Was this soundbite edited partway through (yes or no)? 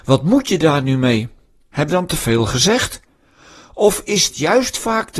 yes